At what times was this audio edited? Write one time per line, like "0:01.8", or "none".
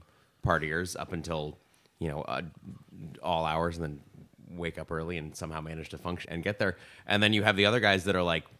0:06.2